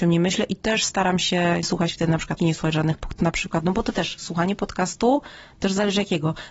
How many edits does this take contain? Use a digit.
3